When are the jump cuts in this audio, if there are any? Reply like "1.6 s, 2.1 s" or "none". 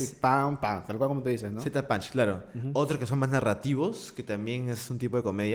none